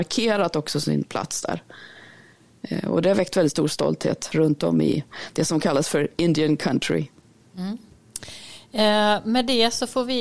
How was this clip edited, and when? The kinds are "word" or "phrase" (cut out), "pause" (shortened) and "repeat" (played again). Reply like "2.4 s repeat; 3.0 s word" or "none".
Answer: none